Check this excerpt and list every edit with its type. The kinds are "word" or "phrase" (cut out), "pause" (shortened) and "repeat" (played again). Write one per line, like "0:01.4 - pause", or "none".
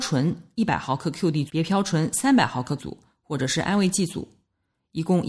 0:01.5 - word
0:02.8 - word